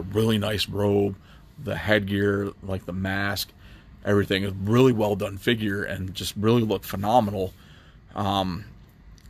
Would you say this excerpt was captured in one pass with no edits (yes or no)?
yes